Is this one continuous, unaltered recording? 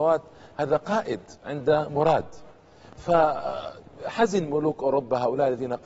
yes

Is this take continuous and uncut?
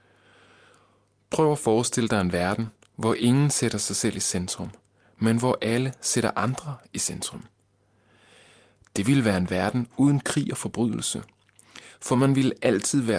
yes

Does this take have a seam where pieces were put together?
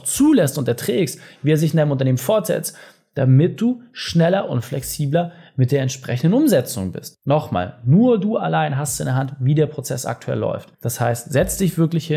no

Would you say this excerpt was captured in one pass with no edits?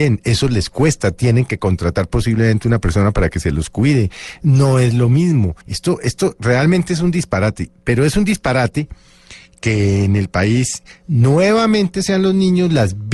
no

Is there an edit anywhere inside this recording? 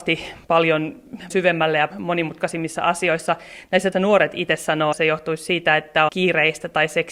yes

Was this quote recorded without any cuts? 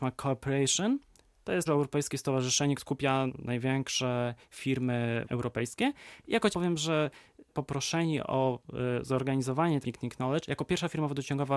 no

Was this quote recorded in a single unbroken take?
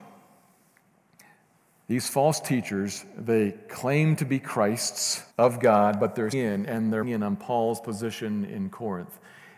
no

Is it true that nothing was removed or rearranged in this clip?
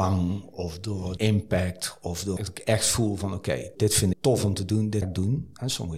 no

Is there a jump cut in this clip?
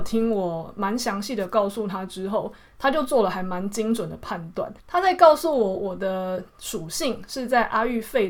yes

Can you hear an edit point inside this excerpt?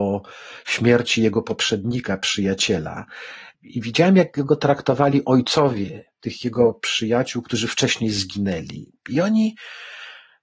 yes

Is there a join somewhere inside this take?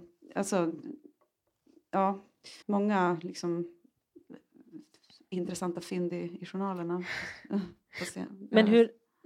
yes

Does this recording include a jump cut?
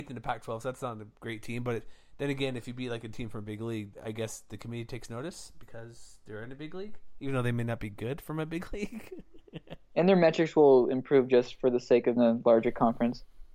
yes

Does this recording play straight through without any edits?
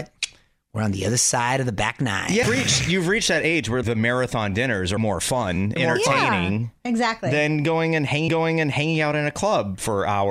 no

